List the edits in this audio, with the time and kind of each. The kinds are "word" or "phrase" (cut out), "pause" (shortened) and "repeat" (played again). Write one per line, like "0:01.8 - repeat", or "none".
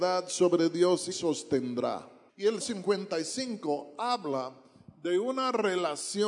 0:01.1 - phrase
0:02.3 - pause
0:02.6 - word